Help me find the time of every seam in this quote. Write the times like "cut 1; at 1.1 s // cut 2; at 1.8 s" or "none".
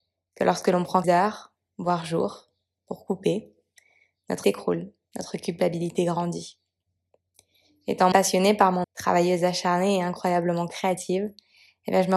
cut 1; at 1.0 s // cut 2; at 4.4 s // cut 3; at 8.1 s // cut 4; at 8.8 s